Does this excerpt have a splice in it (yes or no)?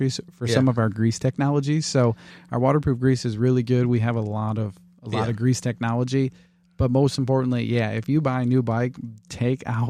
no